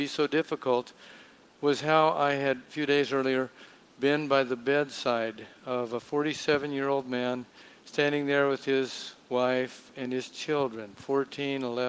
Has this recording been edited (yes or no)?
yes